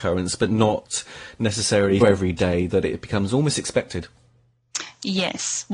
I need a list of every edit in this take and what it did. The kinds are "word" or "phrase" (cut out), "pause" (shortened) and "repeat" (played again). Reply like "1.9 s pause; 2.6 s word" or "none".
2.0 s word